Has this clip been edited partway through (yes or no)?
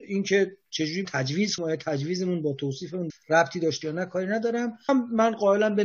yes